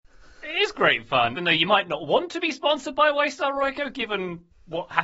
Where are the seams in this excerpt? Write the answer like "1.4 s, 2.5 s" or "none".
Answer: 1.4 s